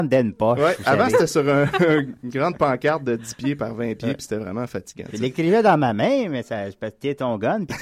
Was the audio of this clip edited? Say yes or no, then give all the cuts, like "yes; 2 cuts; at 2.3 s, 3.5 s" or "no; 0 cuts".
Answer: no; 0 cuts